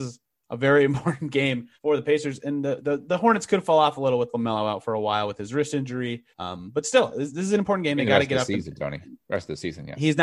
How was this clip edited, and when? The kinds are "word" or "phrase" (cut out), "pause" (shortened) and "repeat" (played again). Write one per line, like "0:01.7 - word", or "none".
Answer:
0:01.8 - pause
0:06.3 - pause